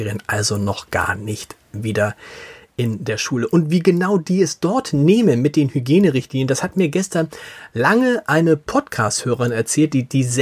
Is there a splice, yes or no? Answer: no